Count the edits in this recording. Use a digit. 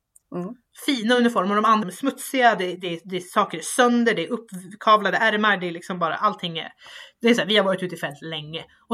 1